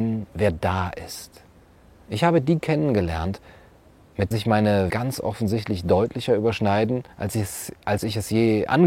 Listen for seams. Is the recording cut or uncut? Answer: cut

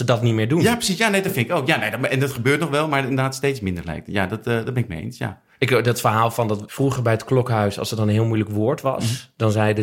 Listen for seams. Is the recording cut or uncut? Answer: uncut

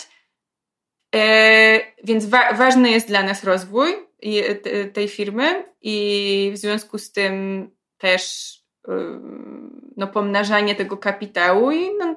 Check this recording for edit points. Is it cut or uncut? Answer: uncut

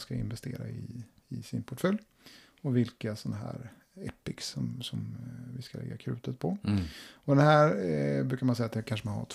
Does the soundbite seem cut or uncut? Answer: uncut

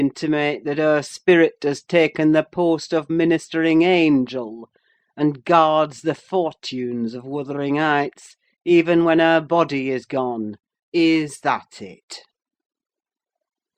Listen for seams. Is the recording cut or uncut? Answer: uncut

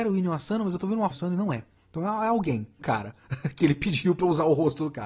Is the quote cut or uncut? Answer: cut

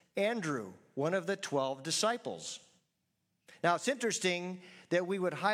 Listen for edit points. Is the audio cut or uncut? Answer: uncut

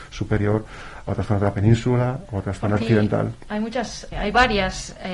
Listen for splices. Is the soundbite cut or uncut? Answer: cut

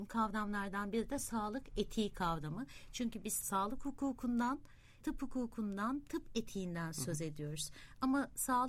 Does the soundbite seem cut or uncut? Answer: uncut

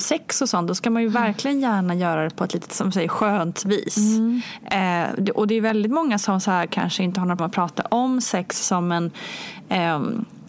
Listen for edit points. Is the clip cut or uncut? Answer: cut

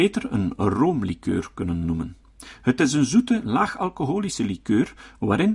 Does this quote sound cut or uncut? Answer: uncut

